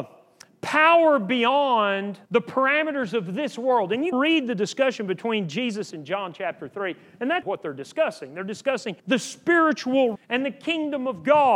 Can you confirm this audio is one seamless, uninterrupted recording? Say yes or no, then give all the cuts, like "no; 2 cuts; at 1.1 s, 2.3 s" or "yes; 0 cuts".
no; 6 cuts; at 2.2 s, 4.1 s, 5.9 s, 7.4 s, 9.0 s, 10.2 s